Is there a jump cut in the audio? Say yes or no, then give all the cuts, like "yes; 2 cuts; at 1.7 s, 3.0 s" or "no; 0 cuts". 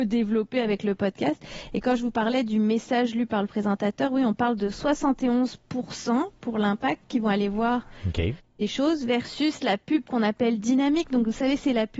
no; 0 cuts